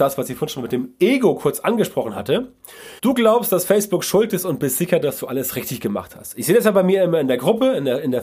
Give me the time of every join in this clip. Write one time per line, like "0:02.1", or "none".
0:03.0